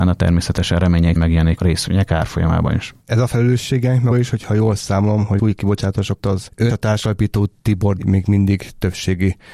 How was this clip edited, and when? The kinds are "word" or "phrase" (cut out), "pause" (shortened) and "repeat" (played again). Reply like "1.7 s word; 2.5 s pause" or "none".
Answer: 1.2 s word; 1.6 s word; 4.1 s word; 5.4 s word; 6.2 s word; 6.7 s word; 8.0 s word